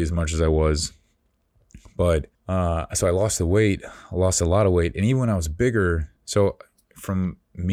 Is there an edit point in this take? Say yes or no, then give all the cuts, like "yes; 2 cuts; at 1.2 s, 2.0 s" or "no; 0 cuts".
yes; 2 cuts; at 2.3 s, 6.2 s